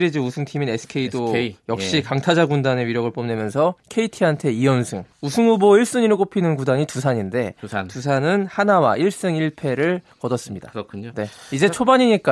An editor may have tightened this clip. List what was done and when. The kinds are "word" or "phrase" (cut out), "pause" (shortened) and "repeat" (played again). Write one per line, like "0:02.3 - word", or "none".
0:03.8 - pause
0:05.1 - pause